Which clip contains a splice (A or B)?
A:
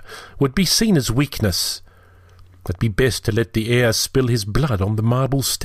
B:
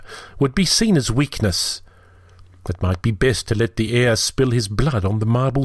A